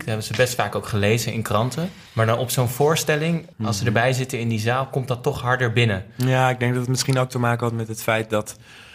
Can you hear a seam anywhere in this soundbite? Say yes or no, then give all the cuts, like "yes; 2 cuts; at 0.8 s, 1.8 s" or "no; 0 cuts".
yes; 2 cuts; at 2.1 s, 3.5 s